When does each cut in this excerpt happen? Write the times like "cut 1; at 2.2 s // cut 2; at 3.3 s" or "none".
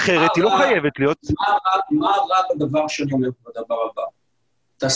none